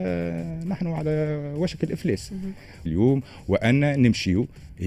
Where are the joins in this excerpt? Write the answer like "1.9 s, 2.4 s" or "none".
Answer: 2.8 s